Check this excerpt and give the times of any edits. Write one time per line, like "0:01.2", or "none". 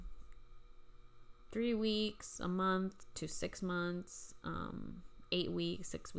none